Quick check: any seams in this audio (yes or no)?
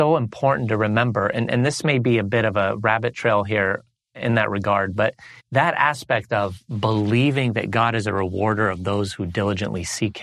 yes